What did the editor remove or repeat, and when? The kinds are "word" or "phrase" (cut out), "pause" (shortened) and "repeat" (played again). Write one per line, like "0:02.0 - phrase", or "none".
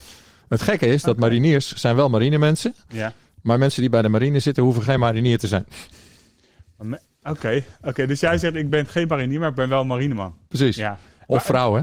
none